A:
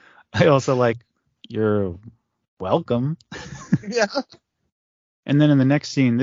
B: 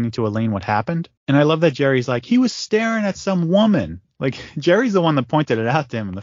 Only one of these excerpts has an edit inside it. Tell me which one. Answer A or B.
B